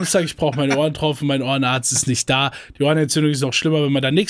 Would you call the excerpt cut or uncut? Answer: uncut